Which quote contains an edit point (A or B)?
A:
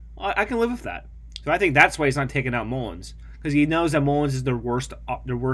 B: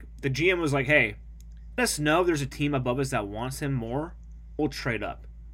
B